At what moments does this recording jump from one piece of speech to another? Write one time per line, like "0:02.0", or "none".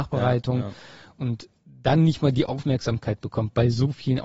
none

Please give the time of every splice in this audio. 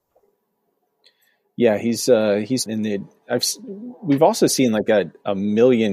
0:02.7

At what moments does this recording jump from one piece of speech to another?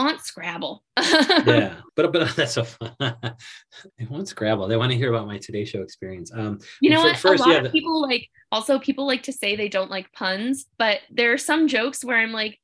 0:01.9
0:03.9
0:10.7

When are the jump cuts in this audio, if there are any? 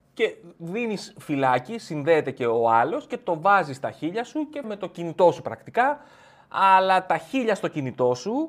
0:04.6

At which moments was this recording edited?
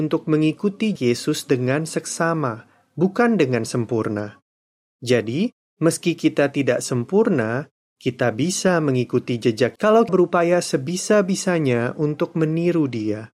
0:01.0
0:09.8
0:10.1

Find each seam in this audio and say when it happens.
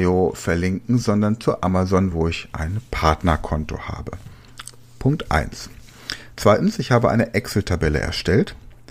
none

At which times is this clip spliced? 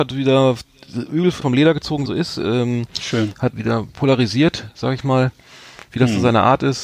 0:01.4
0:02.1
0:03.5

